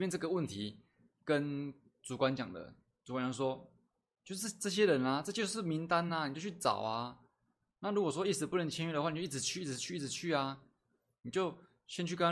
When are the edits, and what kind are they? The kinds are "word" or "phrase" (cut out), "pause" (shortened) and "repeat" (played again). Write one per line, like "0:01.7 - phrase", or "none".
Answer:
none